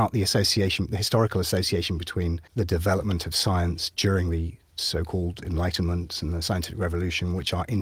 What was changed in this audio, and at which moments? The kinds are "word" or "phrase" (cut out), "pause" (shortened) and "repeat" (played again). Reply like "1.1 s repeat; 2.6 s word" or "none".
none